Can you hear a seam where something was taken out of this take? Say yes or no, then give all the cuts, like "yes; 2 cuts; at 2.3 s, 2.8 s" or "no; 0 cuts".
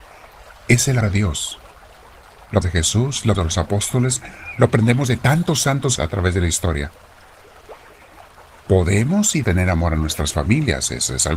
yes; 5 cuts; at 1.0 s, 2.6 s, 3.3 s, 6.0 s, 9.4 s